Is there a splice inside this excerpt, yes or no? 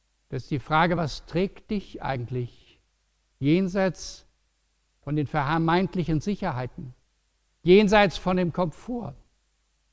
no